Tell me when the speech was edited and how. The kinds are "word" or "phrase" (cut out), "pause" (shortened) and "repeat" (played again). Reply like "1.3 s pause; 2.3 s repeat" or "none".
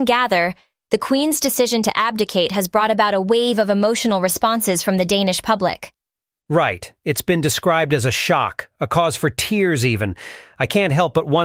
none